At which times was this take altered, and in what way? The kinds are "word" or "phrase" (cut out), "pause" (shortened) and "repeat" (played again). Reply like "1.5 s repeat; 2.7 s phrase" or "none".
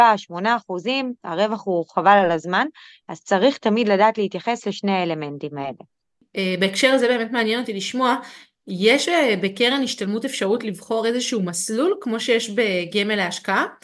none